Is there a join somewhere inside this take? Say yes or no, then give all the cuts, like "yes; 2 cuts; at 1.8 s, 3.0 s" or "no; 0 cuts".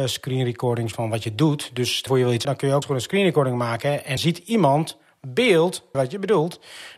yes; 6 cuts; at 0.9 s, 2.1 s, 2.4 s, 2.8 s, 4.2 s, 5.9 s